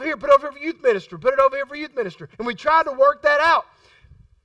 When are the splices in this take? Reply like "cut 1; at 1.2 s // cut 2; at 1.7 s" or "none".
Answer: cut 1; at 2.3 s